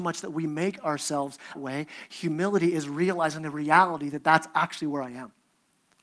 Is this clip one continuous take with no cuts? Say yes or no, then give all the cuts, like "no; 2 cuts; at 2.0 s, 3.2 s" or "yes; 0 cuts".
no; 1 cut; at 1.5 s